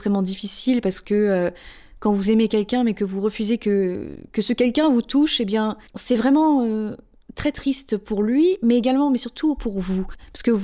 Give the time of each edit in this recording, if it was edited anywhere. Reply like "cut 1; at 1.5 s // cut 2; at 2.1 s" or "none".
cut 1; at 5.9 s

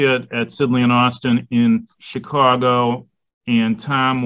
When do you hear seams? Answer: cut 1; at 1.9 s

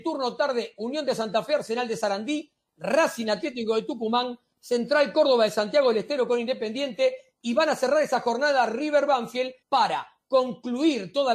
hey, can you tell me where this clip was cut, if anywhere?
cut 1; at 9.6 s

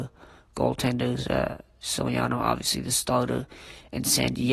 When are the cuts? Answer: none

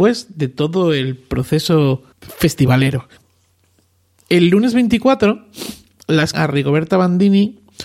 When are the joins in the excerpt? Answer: cut 1; at 2.1 s // cut 2; at 6.3 s

